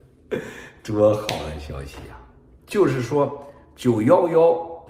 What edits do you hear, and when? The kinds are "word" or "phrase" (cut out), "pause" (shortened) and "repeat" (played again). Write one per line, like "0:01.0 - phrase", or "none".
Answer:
0:02.6 - pause

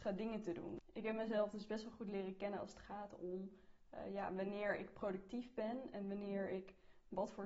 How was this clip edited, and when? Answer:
none

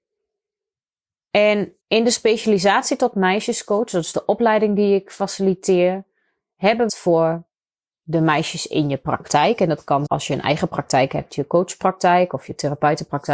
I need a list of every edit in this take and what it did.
0:01.8 - pause
0:06.9 - phrase
0:10.1 - word

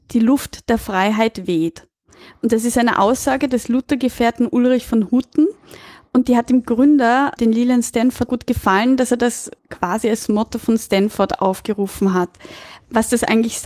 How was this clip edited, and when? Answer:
0:07.4 - word
0:08.3 - word
0:09.6 - pause

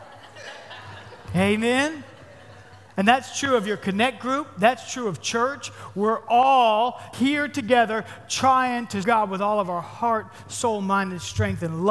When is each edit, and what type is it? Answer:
0:07.1 - word
0:09.0 - word

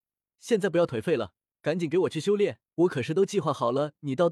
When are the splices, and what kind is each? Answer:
0:01.5 - pause
0:02.7 - pause

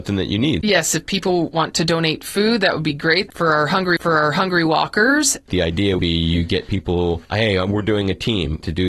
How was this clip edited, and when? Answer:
0:04.0 - repeat
0:06.0 - word
0:07.3 - pause

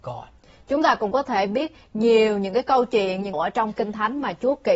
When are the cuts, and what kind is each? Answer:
0:03.3 - phrase

